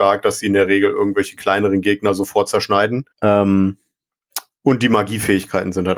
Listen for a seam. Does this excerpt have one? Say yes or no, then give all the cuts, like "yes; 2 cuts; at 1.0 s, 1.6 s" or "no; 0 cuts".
yes; 1 cut; at 3.1 s